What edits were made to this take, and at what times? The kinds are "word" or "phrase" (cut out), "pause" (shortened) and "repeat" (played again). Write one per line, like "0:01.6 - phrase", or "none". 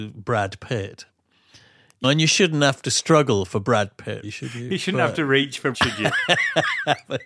0:02.0 - word
0:04.2 - word
0:05.7 - word